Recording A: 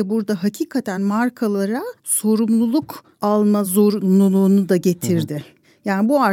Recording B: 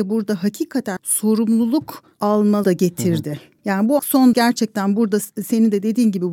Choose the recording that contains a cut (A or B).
B